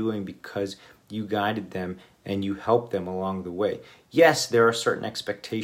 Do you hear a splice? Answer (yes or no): no